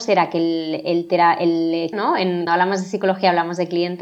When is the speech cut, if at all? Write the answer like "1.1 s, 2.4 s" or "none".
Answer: 1.9 s, 2.5 s

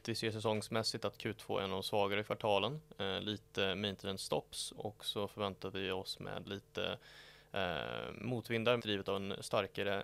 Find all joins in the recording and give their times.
4.8 s, 6.4 s, 8.8 s

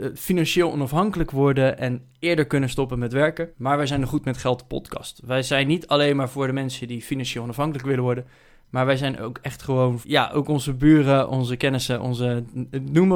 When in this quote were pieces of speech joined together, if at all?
3.5 s, 10.0 s

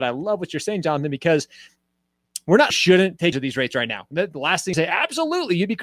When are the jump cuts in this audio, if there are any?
2.7 s, 3.3 s, 4.7 s

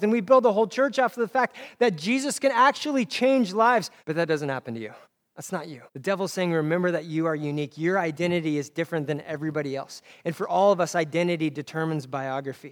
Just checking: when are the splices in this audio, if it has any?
4.0 s, 5.0 s, 5.9 s

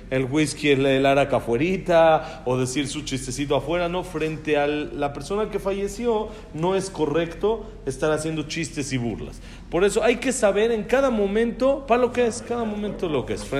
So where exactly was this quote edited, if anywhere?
none

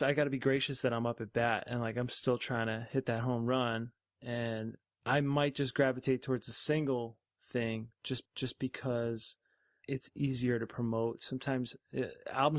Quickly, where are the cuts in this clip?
8.3 s

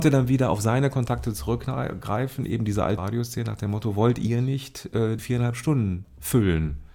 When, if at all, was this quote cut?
3.0 s, 5.2 s

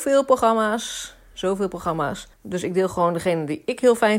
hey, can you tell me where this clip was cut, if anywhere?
2.3 s

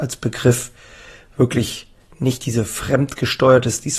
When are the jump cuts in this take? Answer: none

